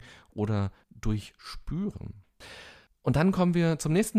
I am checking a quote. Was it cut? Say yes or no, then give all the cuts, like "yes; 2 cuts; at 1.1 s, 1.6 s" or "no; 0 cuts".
no; 0 cuts